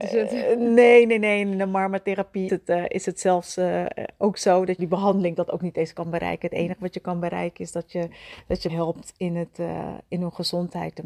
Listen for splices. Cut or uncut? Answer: cut